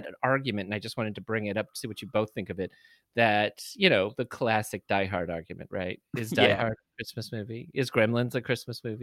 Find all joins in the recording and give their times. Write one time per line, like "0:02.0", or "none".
none